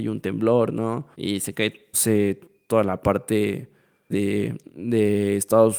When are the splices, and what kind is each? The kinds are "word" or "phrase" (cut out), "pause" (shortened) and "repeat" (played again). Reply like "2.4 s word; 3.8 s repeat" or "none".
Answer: 1.1 s pause; 1.9 s word; 4.1 s word